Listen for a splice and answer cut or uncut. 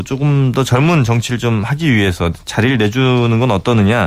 uncut